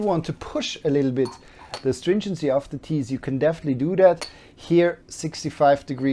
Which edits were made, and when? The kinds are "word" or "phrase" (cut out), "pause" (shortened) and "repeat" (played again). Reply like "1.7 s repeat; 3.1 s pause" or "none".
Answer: 5.0 s pause